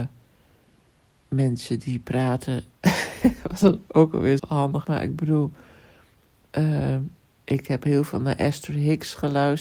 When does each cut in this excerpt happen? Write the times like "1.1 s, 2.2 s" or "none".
3.9 s, 4.4 s, 4.8 s